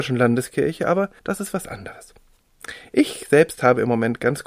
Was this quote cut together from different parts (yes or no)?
yes